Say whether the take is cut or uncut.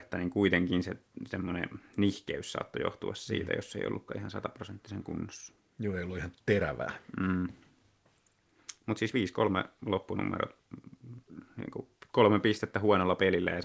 uncut